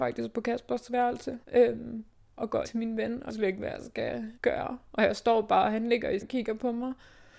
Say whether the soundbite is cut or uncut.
cut